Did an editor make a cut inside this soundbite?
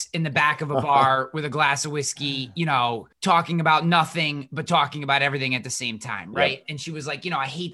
yes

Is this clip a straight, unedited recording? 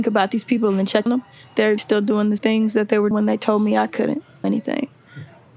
no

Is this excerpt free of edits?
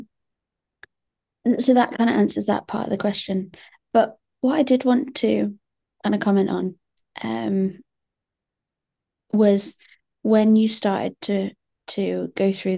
yes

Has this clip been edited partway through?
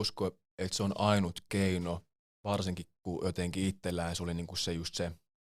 no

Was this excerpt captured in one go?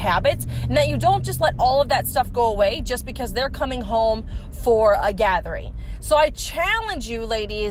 yes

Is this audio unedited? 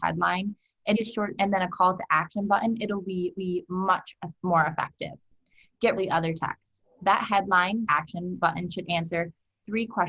no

